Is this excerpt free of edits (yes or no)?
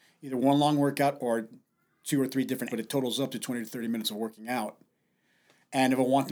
no